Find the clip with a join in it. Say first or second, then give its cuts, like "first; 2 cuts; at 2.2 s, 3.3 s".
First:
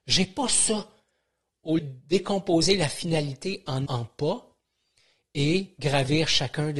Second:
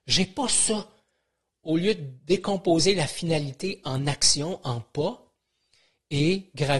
first; 2 cuts; at 1.8 s, 3.9 s